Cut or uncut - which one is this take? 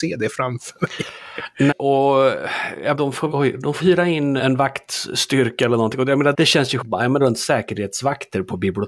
cut